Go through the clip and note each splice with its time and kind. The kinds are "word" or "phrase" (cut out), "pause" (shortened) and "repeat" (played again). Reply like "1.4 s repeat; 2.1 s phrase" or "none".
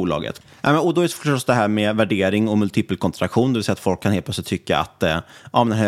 none